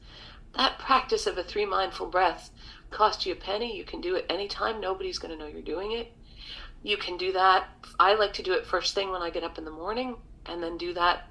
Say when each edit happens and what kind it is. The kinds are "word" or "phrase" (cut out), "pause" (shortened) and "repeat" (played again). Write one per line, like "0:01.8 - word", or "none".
0:02.9 - word

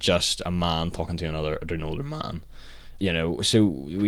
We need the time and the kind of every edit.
0:03.0 - word

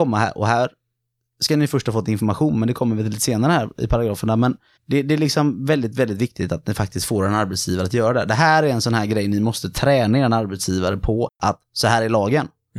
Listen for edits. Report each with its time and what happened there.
0:04.8 - pause
0:11.3 - pause

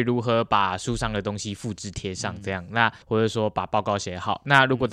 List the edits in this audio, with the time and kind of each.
0:03.0 - pause

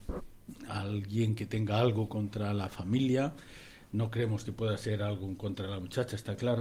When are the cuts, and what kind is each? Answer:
none

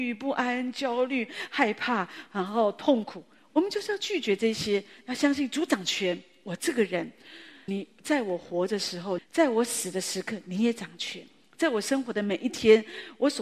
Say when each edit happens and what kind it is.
0:07.7 - word
0:09.2 - phrase

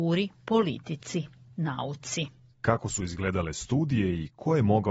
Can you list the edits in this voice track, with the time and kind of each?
none

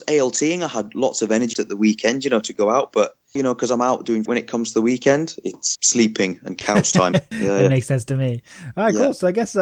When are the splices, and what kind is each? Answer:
0:01.5 - word
0:03.4 - word
0:04.3 - phrase
0:05.8 - word
0:07.3 - word

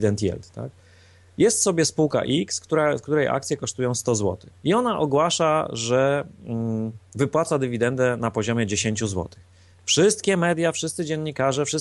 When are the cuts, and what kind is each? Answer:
0:04.6 - pause
0:07.1 - pause

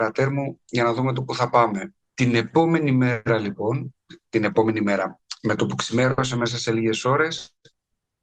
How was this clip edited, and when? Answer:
0:02.0 - pause

